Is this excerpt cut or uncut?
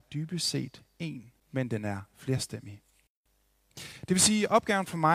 cut